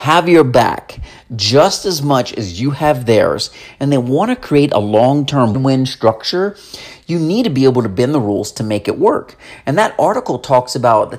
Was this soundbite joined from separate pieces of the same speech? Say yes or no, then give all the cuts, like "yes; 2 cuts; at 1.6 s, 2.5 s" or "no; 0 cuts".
yes; 1 cut; at 5.5 s